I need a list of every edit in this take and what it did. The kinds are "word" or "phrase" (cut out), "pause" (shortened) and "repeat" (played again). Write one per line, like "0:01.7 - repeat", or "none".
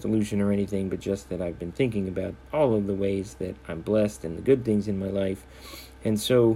0:02.4 - pause